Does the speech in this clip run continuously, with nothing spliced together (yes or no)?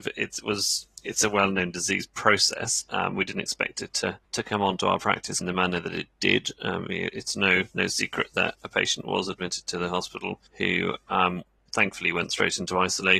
no